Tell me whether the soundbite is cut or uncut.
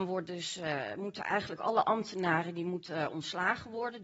uncut